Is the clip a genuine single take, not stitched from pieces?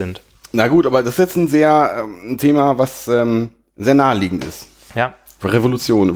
yes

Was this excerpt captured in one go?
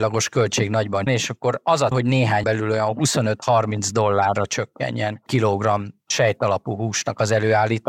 no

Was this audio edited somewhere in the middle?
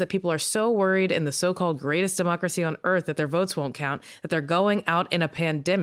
no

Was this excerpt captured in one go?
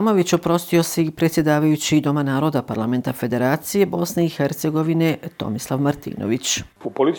yes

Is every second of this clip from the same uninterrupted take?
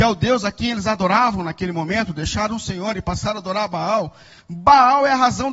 yes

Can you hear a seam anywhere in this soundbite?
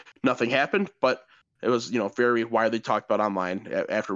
no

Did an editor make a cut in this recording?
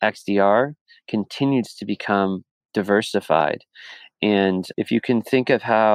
yes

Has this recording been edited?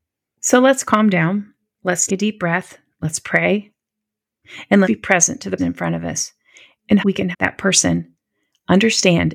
yes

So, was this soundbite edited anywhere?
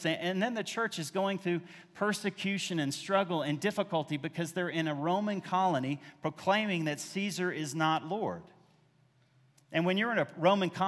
no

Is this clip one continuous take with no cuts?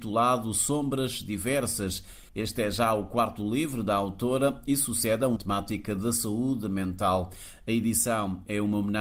no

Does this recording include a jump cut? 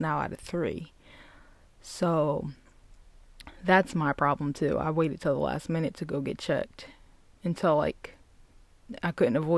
no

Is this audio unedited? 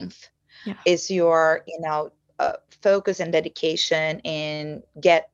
yes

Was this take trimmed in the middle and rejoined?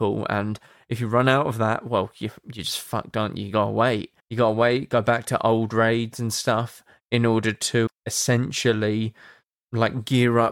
yes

